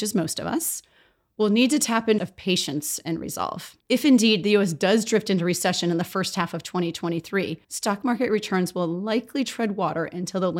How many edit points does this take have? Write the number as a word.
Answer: three